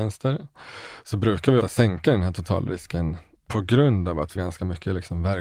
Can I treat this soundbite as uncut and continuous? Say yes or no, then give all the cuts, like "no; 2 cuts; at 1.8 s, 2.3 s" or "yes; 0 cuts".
no; 3 cuts; at 1.6 s, 3.3 s, 4.4 s